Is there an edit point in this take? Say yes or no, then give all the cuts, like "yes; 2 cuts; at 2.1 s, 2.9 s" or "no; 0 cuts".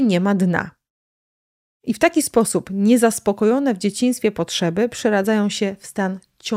no; 0 cuts